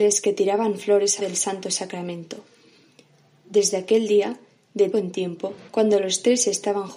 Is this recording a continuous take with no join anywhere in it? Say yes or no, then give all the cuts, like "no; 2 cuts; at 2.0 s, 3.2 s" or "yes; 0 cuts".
no; 3 cuts; at 1.2 s, 4.9 s, 5.7 s